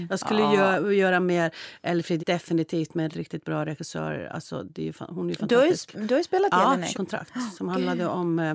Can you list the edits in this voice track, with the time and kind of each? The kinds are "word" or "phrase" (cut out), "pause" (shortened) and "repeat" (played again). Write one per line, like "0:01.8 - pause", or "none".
0:02.2 - word
0:03.1 - word
0:06.9 - word

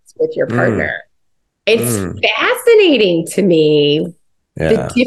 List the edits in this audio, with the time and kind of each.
none

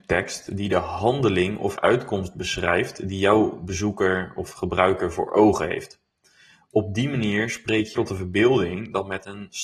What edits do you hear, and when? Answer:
0:01.8 - word
0:08.0 - word

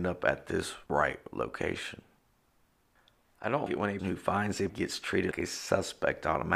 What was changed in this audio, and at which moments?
0:03.7 - word
0:04.0 - word
0:04.7 - word
0:05.3 - word

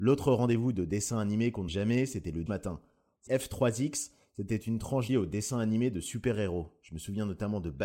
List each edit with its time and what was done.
0:01.7 - word
0:02.5 - word
0:03.3 - word
0:05.1 - word

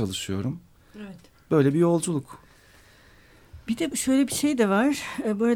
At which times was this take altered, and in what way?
0:03.9 - word

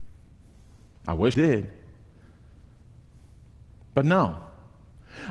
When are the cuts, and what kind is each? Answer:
0:01.3 - word

